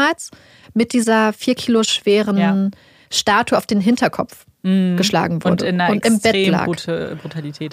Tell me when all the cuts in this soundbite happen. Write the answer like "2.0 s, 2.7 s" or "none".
none